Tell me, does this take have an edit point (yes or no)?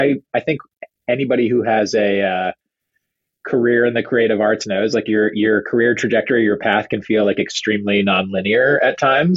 no